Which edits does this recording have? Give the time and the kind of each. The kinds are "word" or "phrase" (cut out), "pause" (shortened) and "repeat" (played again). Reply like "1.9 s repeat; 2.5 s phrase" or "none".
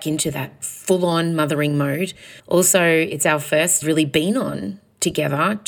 2.4 s pause; 3.8 s phrase